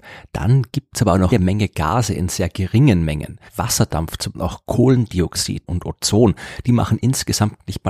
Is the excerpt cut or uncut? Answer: cut